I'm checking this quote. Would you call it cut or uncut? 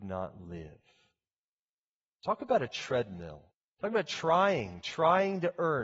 cut